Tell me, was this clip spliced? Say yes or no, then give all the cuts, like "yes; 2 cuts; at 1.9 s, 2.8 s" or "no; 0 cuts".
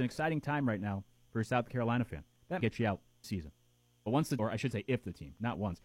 yes; 3 cuts; at 2.6 s, 3.2 s, 4.4 s